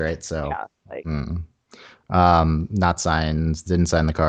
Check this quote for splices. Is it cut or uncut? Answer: uncut